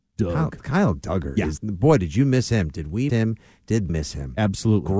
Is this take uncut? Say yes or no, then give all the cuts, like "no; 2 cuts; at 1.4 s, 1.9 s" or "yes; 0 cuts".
no; 3 cuts; at 1.6 s, 3.1 s, 3.9 s